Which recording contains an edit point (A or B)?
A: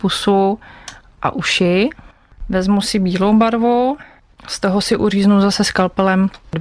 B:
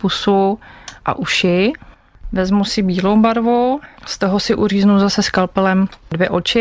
B